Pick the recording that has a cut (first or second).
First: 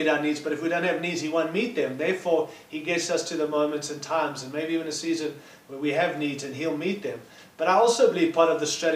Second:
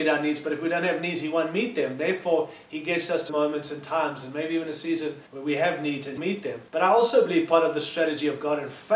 second